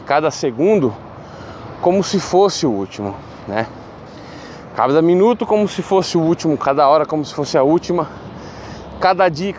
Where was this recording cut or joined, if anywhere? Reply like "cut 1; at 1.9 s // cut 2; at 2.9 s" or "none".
none